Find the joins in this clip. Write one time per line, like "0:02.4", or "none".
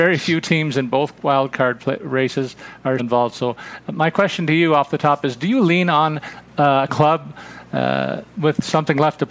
0:03.0
0:06.9